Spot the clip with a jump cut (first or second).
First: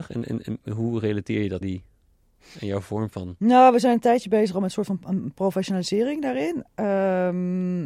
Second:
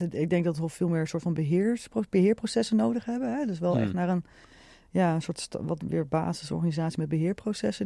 first